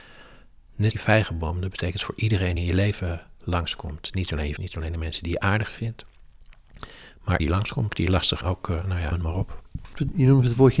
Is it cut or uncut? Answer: cut